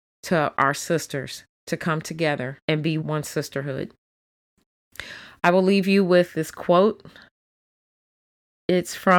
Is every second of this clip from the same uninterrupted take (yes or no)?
no